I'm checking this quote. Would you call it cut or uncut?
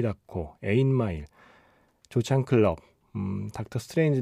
uncut